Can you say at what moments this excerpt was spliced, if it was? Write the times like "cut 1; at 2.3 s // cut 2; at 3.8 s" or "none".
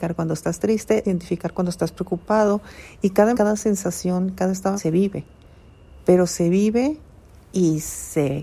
cut 1; at 1.0 s // cut 2; at 3.3 s // cut 3; at 4.8 s